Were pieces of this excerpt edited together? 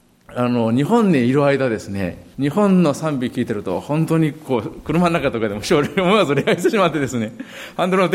yes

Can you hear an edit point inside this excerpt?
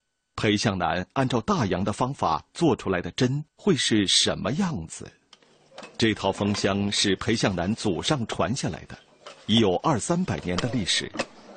yes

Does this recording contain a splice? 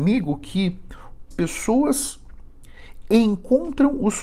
yes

